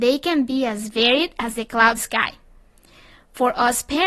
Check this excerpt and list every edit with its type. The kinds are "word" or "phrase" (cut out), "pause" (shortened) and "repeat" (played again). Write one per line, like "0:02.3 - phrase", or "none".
0:02.0 - phrase